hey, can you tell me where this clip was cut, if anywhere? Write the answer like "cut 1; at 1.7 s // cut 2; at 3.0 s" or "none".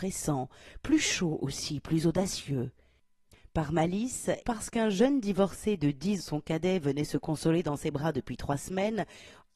cut 1; at 4.4 s // cut 2; at 6.2 s